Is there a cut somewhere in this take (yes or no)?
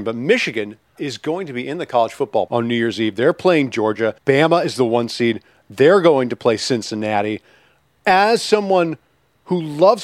yes